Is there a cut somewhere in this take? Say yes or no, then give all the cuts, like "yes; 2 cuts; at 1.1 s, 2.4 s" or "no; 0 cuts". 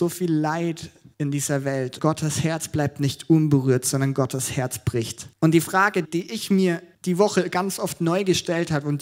yes; 5 cuts; at 1.1 s, 2.0 s, 5.3 s, 6.0 s, 6.9 s